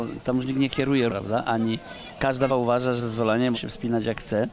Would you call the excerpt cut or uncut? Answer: cut